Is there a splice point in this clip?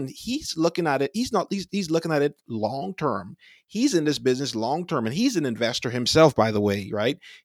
no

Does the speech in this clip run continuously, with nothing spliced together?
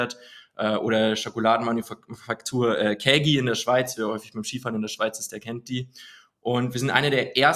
yes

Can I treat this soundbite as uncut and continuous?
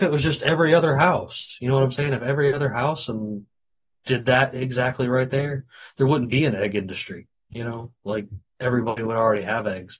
yes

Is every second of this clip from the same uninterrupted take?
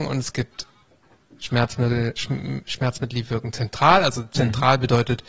no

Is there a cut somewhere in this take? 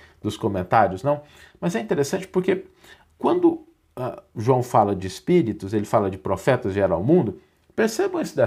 no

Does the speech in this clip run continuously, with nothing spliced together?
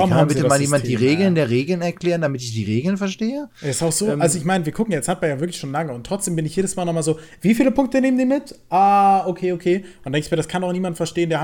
yes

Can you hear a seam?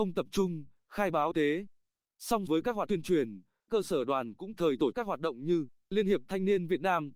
yes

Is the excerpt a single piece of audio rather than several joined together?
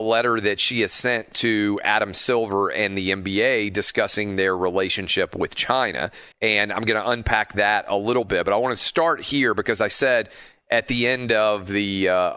no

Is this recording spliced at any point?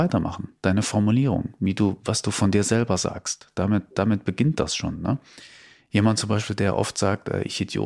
no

